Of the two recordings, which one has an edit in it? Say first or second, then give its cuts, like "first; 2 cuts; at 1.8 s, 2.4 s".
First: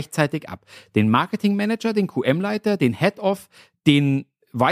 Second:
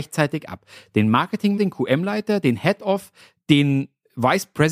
second; 1 cut; at 1.6 s